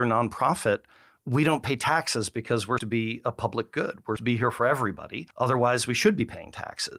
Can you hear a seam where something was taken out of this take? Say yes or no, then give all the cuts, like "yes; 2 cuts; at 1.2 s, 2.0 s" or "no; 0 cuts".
yes; 3 cuts; at 2.8 s, 4.2 s, 5.3 s